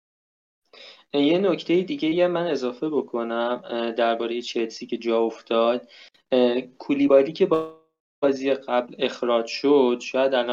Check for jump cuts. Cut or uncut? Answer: uncut